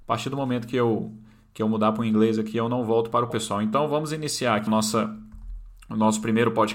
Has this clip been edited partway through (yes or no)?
yes